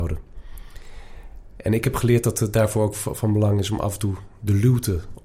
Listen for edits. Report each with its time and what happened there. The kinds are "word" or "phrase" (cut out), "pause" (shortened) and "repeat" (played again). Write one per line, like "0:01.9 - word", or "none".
none